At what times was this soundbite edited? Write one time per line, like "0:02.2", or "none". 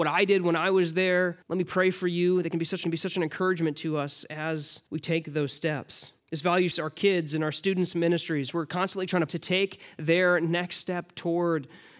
0:01.4
0:02.8
0:04.9
0:06.2
0:06.7
0:09.3